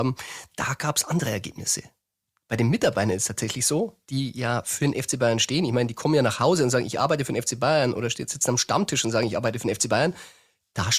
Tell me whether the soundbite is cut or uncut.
uncut